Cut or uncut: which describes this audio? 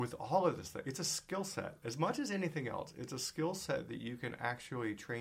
uncut